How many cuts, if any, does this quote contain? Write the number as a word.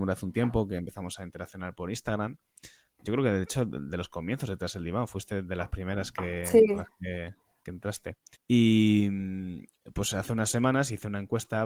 one